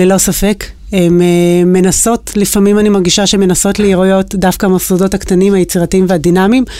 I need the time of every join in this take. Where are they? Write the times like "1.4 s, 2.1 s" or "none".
none